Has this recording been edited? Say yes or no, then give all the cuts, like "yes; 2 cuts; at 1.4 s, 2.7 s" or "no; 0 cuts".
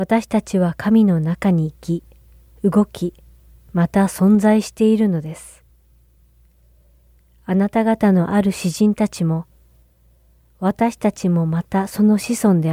no; 0 cuts